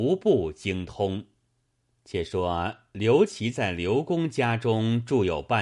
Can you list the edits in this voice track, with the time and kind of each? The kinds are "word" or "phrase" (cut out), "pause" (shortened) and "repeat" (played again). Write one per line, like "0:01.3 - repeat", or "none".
0:01.6 - pause

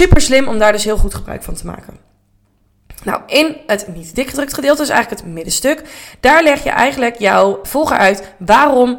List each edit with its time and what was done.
0:07.6 - word

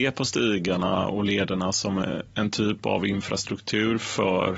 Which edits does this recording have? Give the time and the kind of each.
none

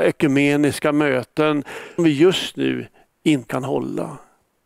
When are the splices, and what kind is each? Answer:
0:02.0 - word
0:03.5 - word

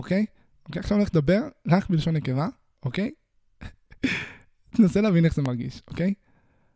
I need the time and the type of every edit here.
none

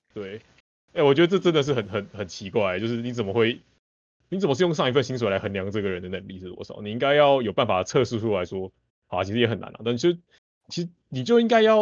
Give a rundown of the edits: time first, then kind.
none

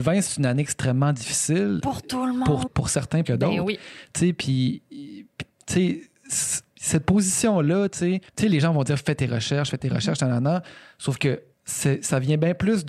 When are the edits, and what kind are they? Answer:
0:02.7 - phrase
0:03.2 - word
0:06.7 - pause
0:08.3 - pause
0:11.5 - pause

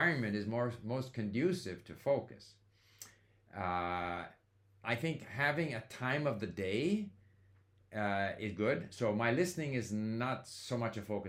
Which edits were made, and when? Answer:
none

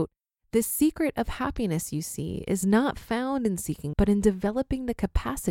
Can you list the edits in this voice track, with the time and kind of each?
0:03.9 - word

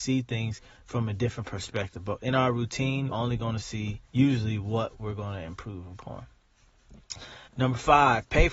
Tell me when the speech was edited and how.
0:03.1 - word
0:04.0 - pause
0:07.5 - pause

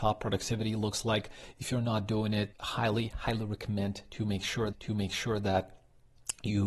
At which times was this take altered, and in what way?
0:02.5 - word
0:04.7 - repeat

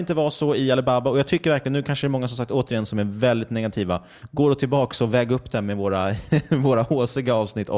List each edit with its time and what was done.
none

